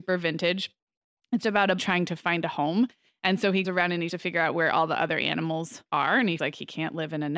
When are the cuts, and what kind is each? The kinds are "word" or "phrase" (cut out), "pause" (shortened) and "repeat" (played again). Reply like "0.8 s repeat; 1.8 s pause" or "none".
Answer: 1.4 s word; 1.8 s word; 3.6 s word; 4.1 s word; 5.9 s word; 6.4 s word